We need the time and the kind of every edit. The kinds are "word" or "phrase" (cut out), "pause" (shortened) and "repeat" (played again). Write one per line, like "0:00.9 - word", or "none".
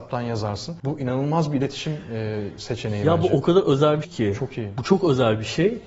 0:04.0 - word

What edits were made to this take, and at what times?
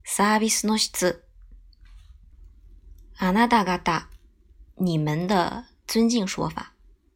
0:04.7 - pause

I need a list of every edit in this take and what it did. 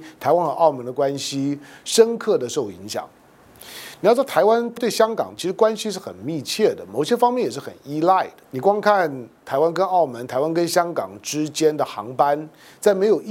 0:05.4 - phrase

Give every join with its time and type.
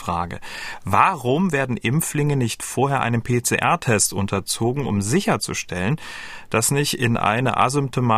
none

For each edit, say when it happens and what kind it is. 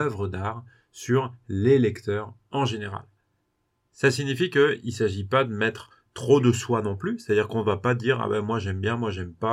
none

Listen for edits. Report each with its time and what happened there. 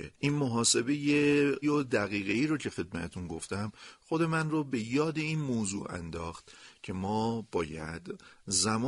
0:01.6 - word

